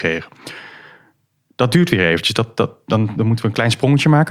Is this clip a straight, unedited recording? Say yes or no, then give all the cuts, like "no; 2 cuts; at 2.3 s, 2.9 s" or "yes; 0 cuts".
yes; 0 cuts